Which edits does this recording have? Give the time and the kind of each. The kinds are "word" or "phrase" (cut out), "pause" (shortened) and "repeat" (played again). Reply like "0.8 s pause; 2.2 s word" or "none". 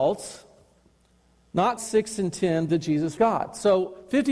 1.8 s word; 2.7 s word; 3.2 s word